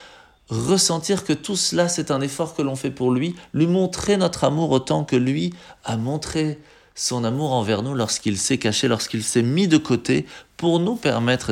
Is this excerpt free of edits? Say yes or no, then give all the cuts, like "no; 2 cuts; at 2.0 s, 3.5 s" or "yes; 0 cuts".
yes; 0 cuts